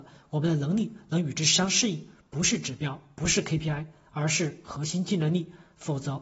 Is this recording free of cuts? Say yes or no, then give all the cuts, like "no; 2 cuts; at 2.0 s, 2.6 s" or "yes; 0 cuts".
yes; 0 cuts